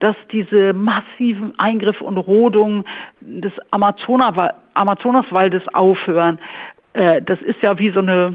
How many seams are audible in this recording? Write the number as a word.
zero